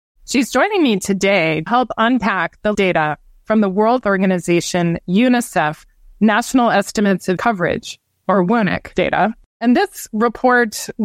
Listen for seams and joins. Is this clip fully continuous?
no; 4 cuts; at 1.7 s, 2.7 s, 4.0 s, 7.4 s

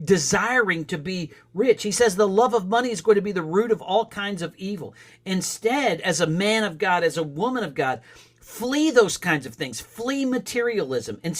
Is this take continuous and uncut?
yes; 0 cuts

